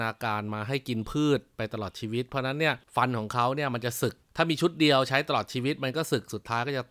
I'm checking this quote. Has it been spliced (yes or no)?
no